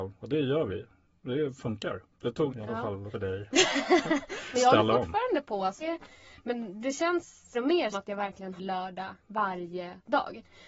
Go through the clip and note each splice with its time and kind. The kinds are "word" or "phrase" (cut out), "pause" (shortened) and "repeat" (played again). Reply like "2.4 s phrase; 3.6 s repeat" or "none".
2.1 s pause; 2.5 s phrase; 3.1 s word; 4.5 s word; 5.8 s word; 7.5 s word; 7.9 s word; 8.6 s word; 9.2 s pause

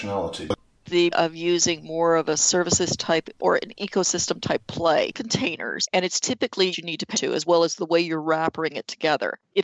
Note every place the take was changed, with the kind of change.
1.1 s word; 3.4 s word; 5.1 s phrase; 6.7 s phrase; 7.1 s word

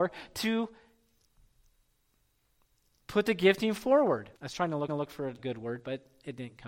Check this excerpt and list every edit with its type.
4.4 s pause; 4.9 s repeat; 5.4 s word

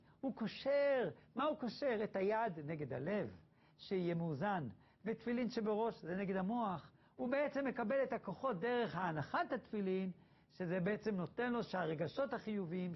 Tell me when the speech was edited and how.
none

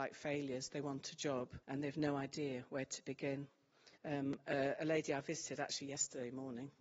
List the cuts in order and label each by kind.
1.6 s pause; 4.0 s pause

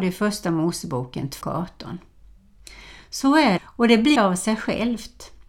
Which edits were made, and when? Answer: 1.4 s word; 3.6 s word; 4.2 s word

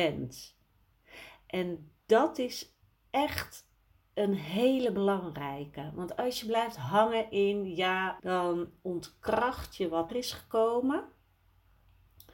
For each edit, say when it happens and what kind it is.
2.0 s pause; 3.0 s pause; 8.2 s word; 10.1 s word

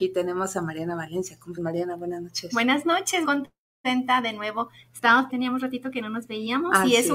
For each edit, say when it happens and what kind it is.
1.6 s word; 3.2 s word; 5.3 s phrase

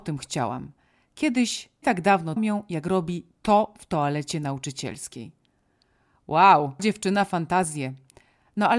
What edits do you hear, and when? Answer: 1.8 s word; 2.4 s phrase; 6.8 s word

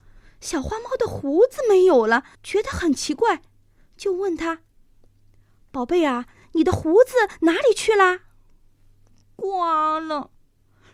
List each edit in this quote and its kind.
2.3 s pause

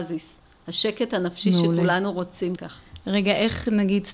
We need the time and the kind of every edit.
2.6 s word

